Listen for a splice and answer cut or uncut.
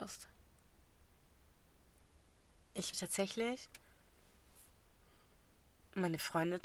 cut